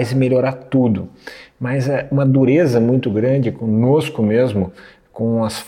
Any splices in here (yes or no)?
no